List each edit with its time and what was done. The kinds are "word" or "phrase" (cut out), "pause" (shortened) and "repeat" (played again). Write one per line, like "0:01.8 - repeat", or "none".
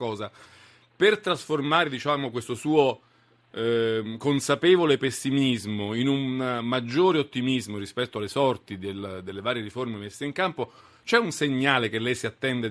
none